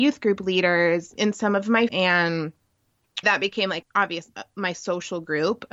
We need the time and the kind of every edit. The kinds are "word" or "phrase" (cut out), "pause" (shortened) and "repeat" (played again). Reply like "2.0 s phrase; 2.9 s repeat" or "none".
1.2 s word; 1.9 s word; 3.2 s word; 3.8 s word